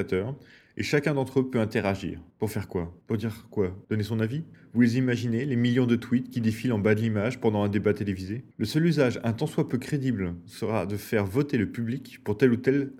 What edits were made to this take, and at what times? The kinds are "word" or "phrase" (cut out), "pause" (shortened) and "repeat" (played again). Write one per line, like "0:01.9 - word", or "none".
0:02.3 - pause
0:03.0 - pause
0:03.8 - pause
0:08.5 - pause

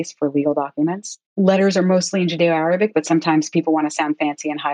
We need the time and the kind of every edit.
0:01.2 - pause

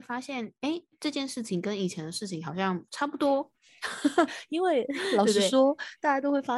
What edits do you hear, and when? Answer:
0:02.9 - pause

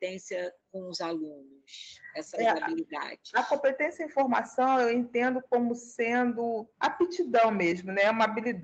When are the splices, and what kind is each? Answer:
0:02.3 - word
0:06.7 - pause

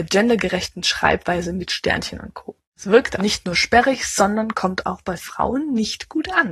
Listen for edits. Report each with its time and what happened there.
0:02.6 - pause
0:03.2 - word

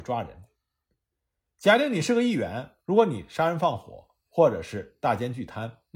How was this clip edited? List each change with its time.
0:02.8 - pause

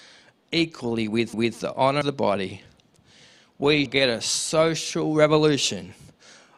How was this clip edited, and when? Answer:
0:01.3 - repeat
0:02.0 - word
0:03.9 - word

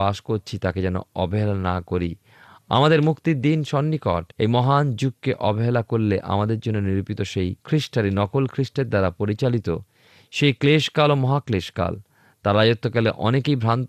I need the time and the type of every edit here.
0:04.3 - pause
0:07.6 - pause

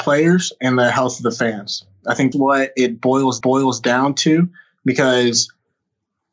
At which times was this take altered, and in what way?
0:02.3 - word
0:03.4 - repeat

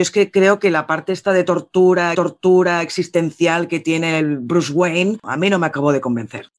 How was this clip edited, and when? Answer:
0:02.1 - repeat

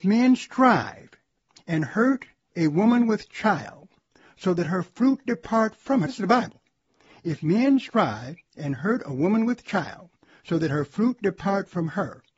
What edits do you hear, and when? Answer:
0:06.1 - word

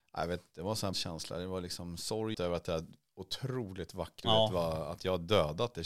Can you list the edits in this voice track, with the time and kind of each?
0:00.9 - word
0:02.3 - phrase
0:04.2 - word

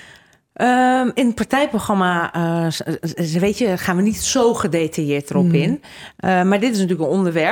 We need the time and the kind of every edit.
none

